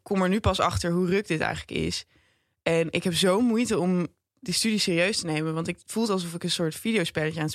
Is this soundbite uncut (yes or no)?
yes